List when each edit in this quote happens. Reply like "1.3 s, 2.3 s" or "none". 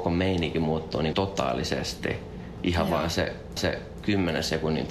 1.1 s, 3.6 s